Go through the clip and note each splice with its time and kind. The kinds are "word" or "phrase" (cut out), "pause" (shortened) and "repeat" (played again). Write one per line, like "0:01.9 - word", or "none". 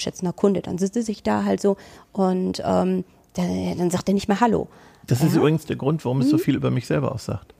none